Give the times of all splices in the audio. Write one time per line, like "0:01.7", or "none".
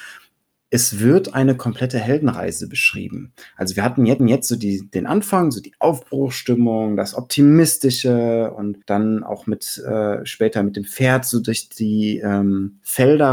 0:04.2
0:08.8